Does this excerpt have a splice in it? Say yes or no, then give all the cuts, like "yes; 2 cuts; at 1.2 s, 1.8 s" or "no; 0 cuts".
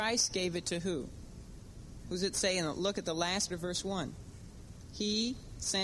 yes; 1 cut; at 3.5 s